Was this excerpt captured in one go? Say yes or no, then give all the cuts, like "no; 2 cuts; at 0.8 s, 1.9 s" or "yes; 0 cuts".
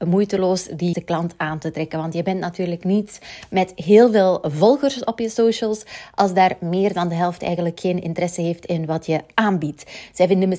no; 1 cut; at 0.9 s